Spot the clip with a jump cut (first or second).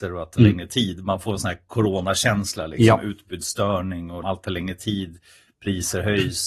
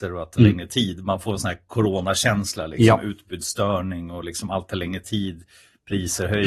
first